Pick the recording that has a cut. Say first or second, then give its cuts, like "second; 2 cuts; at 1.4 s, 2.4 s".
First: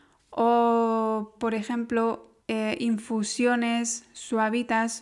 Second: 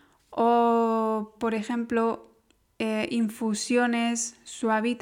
first; 1 cut; at 2.4 s